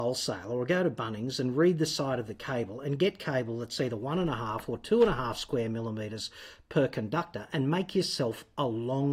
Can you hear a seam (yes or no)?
no